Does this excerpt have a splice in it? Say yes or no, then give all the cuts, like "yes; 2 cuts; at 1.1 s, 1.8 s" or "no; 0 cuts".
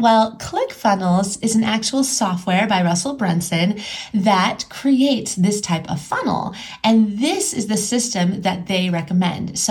no; 0 cuts